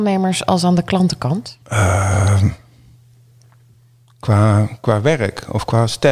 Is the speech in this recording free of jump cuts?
no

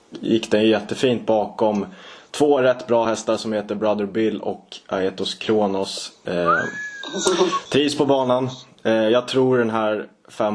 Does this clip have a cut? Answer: no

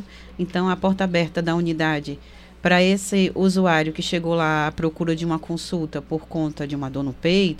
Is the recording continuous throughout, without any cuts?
yes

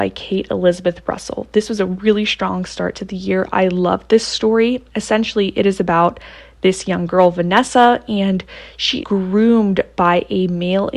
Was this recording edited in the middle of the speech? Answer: yes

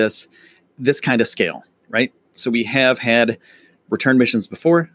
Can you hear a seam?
no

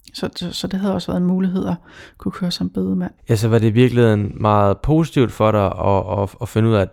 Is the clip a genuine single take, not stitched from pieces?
no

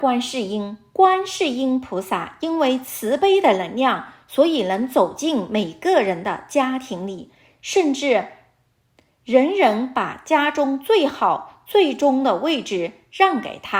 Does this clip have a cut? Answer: no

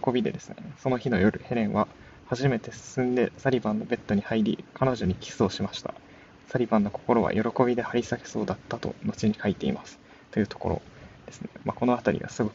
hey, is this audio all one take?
yes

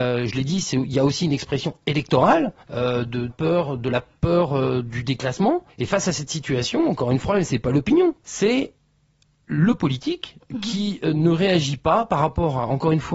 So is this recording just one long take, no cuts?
no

